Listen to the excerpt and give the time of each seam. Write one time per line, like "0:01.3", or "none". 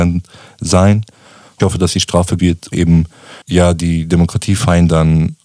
0:01.6
0:02.4
0:02.7
0:03.4